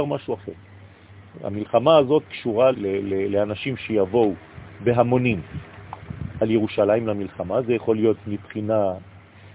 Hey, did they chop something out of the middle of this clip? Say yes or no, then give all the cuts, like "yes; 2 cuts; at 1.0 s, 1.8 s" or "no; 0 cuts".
yes; 2 cuts; at 2.3 s, 2.7 s